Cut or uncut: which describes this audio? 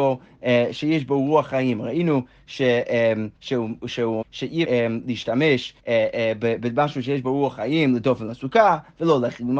cut